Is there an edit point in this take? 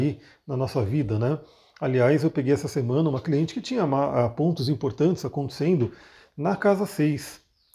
no; 0 cuts

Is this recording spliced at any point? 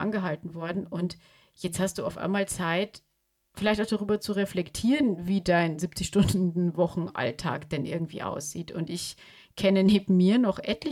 no; 0 cuts

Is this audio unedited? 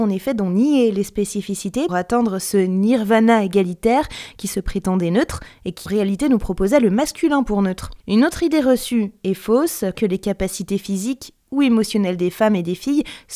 no; 4 cuts; at 1.9 s, 5.9 s, 8.0 s, 9.9 s

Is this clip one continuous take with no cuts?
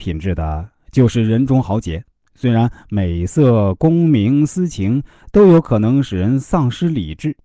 no; 1 cut; at 2.1 s

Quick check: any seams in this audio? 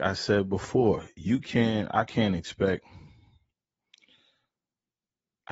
no; 0 cuts

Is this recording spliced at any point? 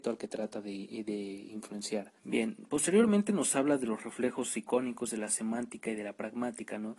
yes; 1 cut; at 2.2 s

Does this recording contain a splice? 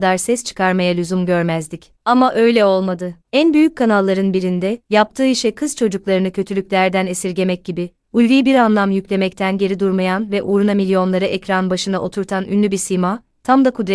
yes; 3 cuts; at 2.0 s, 3.2 s, 4.8 s

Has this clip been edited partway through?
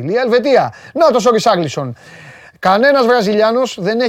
no; 0 cuts

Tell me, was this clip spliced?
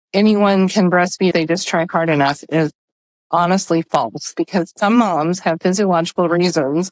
yes; 1 cut; at 1.3 s

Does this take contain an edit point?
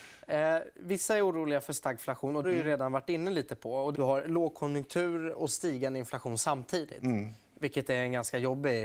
yes; 2 cuts; at 2.4 s, 3.9 s

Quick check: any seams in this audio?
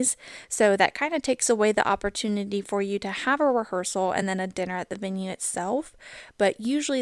no; 0 cuts

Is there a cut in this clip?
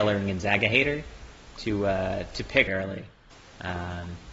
yes; 1 cut; at 2.7 s

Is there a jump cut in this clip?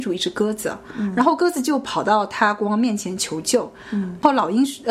no; 0 cuts

